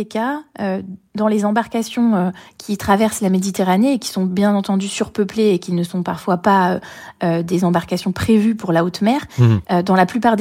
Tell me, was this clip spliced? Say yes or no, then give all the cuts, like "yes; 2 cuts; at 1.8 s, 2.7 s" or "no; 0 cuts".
no; 0 cuts